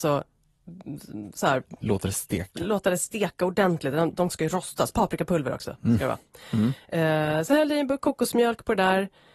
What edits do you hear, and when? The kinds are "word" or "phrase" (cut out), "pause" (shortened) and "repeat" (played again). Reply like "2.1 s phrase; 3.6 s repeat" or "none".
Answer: 4.3 s word